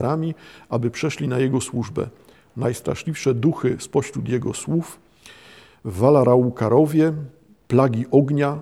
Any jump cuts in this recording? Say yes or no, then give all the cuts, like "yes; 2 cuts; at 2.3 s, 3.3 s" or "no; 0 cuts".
no; 0 cuts